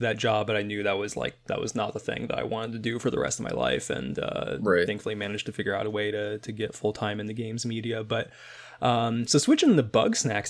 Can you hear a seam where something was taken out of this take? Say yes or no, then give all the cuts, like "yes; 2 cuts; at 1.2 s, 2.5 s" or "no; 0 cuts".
no; 0 cuts